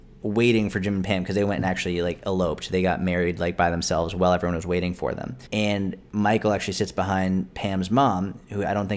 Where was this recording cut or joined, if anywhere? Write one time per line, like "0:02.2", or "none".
0:05.5